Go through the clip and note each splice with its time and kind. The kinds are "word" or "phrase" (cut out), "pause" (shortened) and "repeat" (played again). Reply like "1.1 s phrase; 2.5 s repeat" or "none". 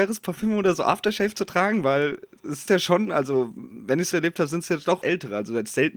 2.7 s word; 4.1 s word; 5.0 s phrase